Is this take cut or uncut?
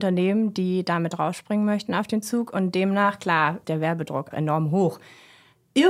cut